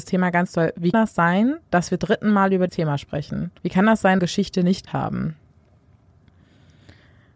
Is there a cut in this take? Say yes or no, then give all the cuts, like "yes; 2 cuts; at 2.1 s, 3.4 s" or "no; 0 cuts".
yes; 6 cuts; at 0.9 s, 2.0 s, 2.7 s, 3.6 s, 4.2 s, 4.9 s